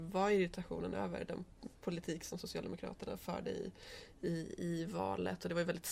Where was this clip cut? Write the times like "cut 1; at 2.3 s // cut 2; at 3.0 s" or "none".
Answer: cut 1; at 1.8 s

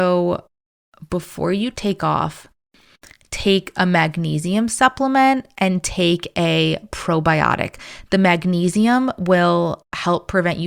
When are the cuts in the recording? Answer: none

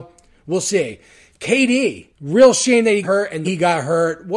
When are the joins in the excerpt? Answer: cut 1; at 2.1 s // cut 2; at 3.0 s // cut 3; at 3.4 s

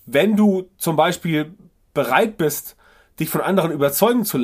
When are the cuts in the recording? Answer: none

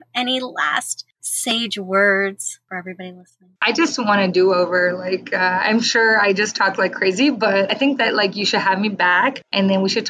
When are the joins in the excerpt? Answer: cut 1; at 3.6 s

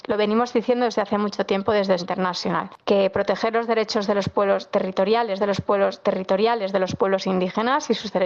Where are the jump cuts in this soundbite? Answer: cut 1; at 2.0 s // cut 2; at 5.4 s

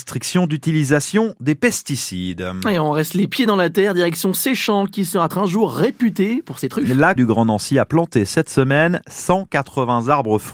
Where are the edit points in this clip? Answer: cut 1; at 5.3 s // cut 2; at 7.2 s

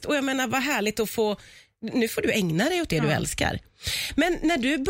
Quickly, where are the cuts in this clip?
none

